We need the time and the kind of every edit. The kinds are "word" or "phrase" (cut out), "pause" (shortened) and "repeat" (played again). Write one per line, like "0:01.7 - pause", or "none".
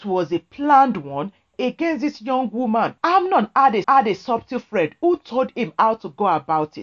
0:03.0 - pause
0:03.8 - repeat